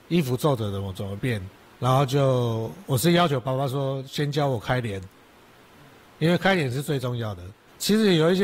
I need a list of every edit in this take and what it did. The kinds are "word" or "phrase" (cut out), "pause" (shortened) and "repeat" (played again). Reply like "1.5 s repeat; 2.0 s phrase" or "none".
1.7 s pause